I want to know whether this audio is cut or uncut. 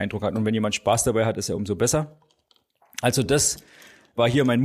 uncut